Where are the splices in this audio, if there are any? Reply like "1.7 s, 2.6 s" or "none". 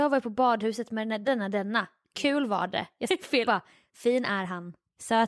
1.2 s, 3.1 s, 3.5 s